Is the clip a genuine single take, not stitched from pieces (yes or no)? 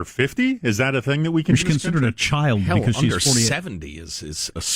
no